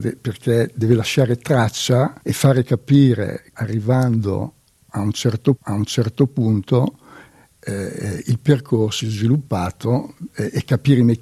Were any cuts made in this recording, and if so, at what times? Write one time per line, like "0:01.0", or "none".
0:02.2
0:03.5
0:05.6
0:09.0